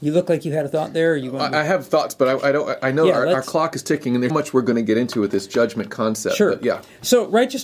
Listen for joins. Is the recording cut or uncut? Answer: cut